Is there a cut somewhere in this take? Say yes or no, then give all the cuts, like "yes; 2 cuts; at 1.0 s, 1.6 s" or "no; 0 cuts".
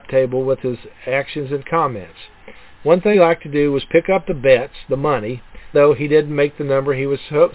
yes; 2 cuts; at 3.1 s, 5.7 s